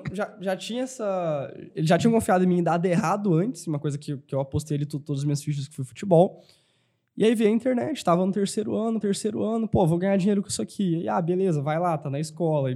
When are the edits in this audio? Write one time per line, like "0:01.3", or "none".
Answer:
0:09.0